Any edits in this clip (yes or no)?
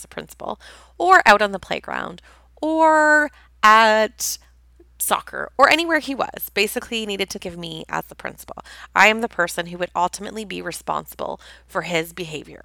yes